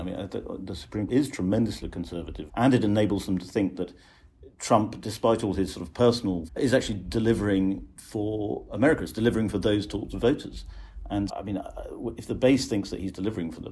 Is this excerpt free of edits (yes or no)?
no